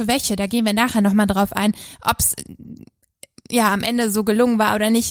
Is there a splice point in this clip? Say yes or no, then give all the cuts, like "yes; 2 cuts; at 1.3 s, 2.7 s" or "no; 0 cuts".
no; 0 cuts